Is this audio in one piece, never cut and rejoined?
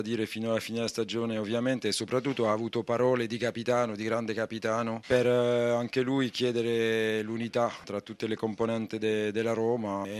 yes; 0 cuts

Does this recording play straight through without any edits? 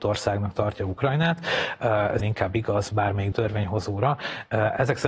no; 3 cuts; at 2.2 s, 2.9 s, 3.3 s

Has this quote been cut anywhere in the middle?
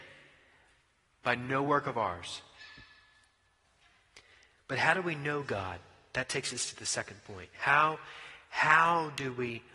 no; 0 cuts

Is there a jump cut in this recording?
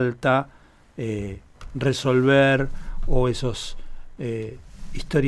no; 0 cuts

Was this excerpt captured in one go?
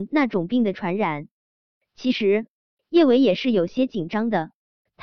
yes; 0 cuts

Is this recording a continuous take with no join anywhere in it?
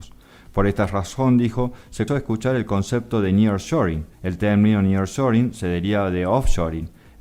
no; 2 cuts; at 2.1 s, 4.1 s

